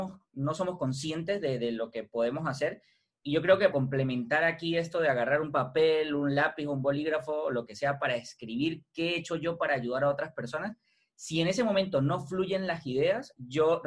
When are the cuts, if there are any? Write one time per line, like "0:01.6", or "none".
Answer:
0:03.7

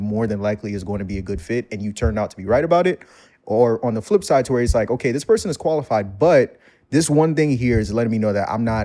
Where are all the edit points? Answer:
none

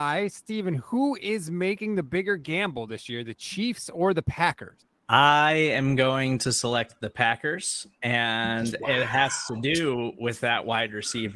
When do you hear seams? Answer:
none

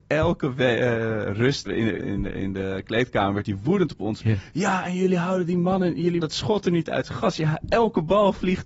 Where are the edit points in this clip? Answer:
0:01.7
0:02.0
0:06.2

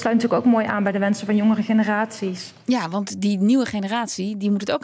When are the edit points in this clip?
none

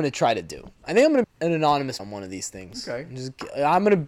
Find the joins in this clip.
0:01.2
0:02.0

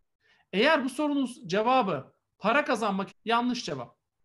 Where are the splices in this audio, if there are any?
0:03.1

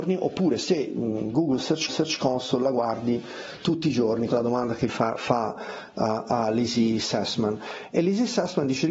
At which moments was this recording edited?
0:01.9
0:04.3
0:04.9

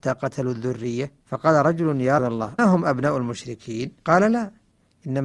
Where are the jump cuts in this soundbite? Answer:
0:01.2
0:02.2
0:02.6
0:04.0

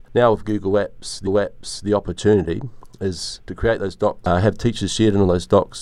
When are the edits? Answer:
0:01.3

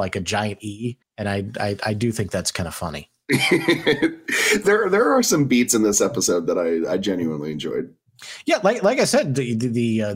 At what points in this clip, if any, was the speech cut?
0:01.0

